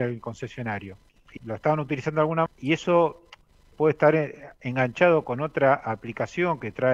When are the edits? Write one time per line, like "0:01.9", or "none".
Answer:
0:01.4
0:02.5